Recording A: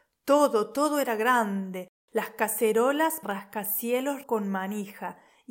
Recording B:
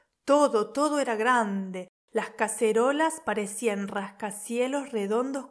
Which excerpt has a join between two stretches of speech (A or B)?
A